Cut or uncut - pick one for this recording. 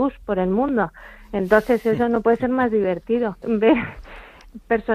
cut